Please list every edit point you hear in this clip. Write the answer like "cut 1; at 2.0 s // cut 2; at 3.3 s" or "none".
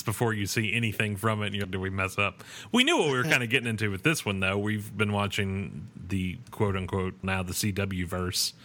cut 1; at 1.6 s // cut 2; at 7.2 s